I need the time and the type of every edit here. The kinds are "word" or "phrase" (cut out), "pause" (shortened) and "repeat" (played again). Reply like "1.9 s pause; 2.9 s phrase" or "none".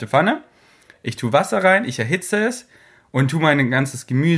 none